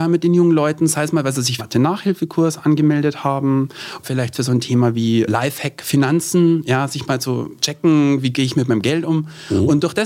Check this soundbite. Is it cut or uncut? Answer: cut